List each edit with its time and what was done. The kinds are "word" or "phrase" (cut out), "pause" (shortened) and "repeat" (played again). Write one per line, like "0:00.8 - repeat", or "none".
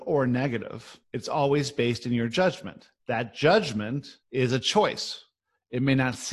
0:01.0 - pause
0:03.0 - pause
0:04.2 - pause